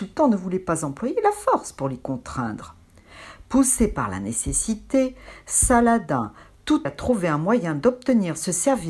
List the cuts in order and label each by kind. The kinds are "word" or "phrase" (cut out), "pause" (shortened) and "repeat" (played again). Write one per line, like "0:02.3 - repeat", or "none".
0:06.9 - word